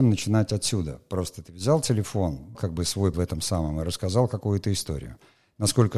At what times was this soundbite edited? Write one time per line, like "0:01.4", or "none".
0:02.6
0:03.1